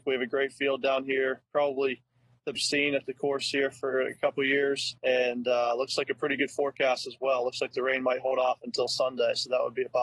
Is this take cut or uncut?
cut